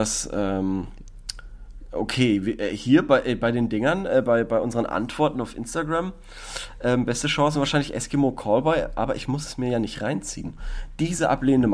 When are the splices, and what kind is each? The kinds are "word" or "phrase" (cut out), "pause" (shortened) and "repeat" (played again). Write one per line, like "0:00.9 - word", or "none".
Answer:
none

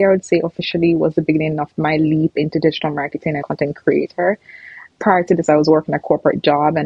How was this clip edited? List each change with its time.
0:03.4 - phrase

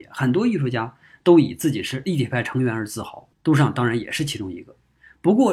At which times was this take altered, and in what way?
0:03.3 - pause

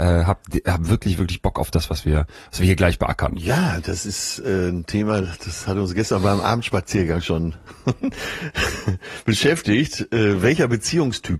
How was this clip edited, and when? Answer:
none

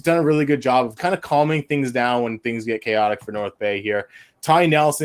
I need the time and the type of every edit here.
0:01.0 - word

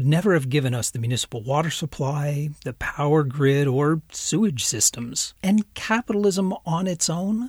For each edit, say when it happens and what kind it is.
0:05.4 - pause

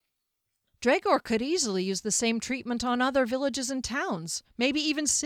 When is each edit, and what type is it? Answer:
none

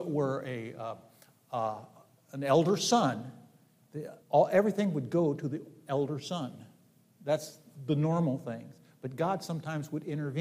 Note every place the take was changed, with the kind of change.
0:04.2 - pause

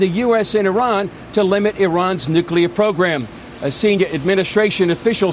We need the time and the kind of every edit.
none

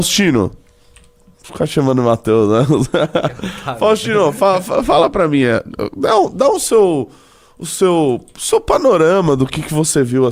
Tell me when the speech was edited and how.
none

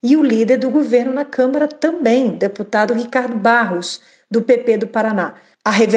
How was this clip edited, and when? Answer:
none

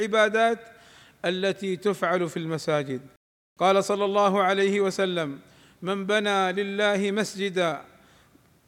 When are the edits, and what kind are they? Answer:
none

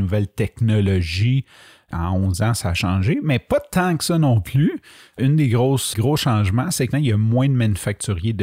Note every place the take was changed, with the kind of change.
0:05.9 - word
0:06.9 - word

